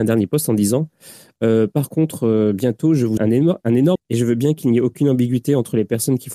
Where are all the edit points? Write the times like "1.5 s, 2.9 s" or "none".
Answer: 3.2 s, 4.0 s